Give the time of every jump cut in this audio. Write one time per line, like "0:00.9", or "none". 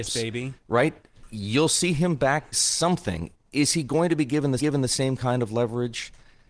0:02.5
0:04.6